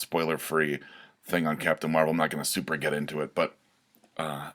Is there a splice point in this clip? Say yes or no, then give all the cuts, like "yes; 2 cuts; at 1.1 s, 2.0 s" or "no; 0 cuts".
no; 0 cuts